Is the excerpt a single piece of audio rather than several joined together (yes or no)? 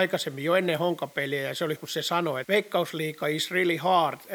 no